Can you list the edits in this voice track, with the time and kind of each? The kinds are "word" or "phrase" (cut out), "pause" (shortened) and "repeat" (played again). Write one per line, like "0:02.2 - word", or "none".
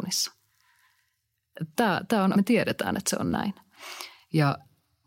0:02.3 - word